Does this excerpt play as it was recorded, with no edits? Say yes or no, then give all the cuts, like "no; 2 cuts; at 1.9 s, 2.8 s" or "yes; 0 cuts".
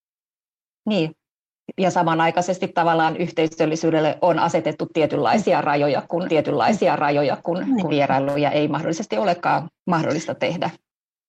no; 3 cuts; at 6.3 s, 7.9 s, 9.8 s